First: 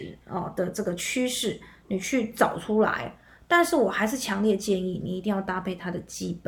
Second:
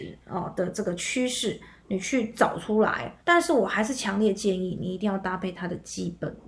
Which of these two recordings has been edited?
second; 1 cut; at 3.2 s

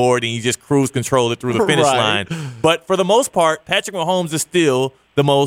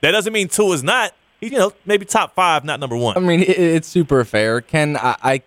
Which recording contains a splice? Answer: second; 1 cut; at 1.5 s

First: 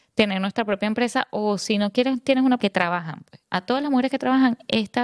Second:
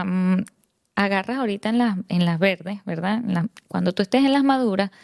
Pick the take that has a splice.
first; 1 cut; at 2.6 s

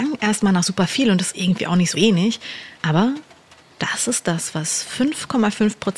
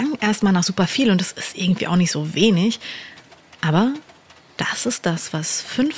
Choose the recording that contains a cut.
first; 3 cuts; at 1.3 s, 1.9 s, 2.7 s

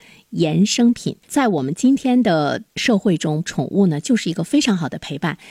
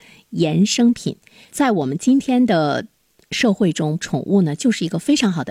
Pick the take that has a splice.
first; 2 cuts; at 1.2 s, 2.7 s

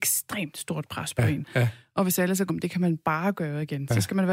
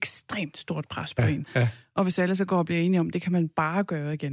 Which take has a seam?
first; 1 cut; at 2.5 s

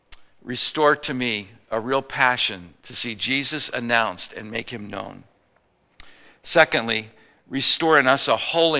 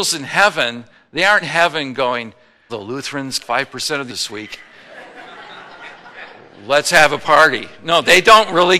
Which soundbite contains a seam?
second; 4 cuts; at 1.4 s, 2.7 s, 3.4 s, 4.1 s

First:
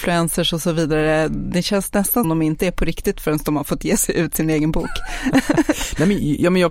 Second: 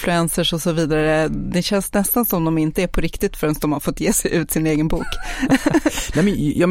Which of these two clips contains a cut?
first; 1 cut; at 2.2 s

